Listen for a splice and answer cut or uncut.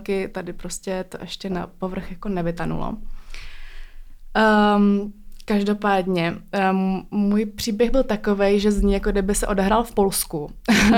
uncut